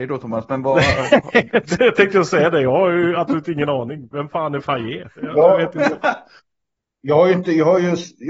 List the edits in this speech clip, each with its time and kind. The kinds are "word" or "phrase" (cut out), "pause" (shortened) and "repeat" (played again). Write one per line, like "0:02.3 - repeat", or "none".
none